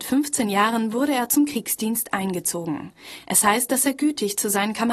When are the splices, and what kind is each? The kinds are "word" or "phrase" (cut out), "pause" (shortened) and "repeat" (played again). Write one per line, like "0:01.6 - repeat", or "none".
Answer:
none